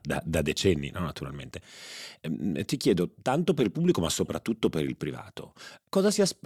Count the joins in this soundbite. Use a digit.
1